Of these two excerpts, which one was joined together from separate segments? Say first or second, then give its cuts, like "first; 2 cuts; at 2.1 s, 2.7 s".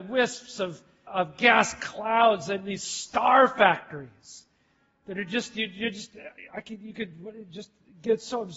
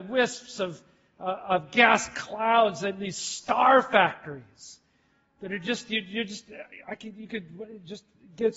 first; 1 cut; at 1.1 s